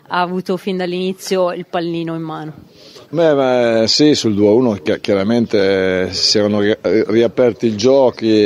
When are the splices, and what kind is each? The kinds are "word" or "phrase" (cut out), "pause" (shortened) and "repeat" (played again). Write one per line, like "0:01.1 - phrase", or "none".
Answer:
0:03.1 - pause